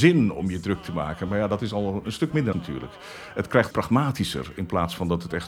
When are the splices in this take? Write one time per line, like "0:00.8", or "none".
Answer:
0:02.5
0:03.7